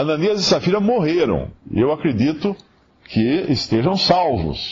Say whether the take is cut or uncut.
cut